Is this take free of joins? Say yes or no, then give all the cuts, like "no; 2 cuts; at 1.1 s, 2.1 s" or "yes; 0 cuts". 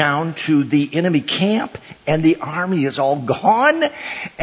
yes; 0 cuts